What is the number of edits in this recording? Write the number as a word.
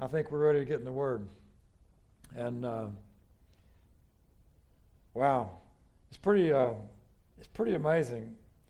zero